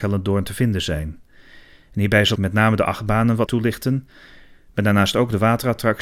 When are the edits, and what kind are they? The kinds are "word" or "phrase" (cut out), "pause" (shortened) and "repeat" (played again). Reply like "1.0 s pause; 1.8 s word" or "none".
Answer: 2.3 s word; 3.5 s word